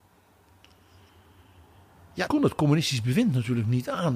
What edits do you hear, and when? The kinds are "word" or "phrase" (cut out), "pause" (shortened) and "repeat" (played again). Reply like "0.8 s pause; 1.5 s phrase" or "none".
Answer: 2.3 s word